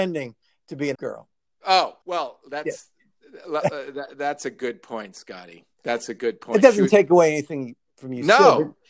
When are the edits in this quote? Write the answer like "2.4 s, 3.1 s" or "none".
0.9 s, 2.0 s, 5.7 s